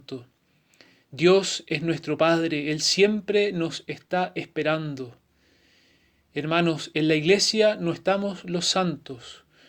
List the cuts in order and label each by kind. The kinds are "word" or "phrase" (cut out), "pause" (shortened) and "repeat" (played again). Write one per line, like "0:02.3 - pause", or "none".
none